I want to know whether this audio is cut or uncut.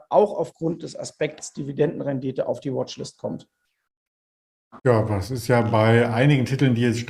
cut